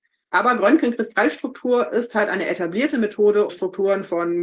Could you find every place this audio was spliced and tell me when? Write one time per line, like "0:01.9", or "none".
0:03.5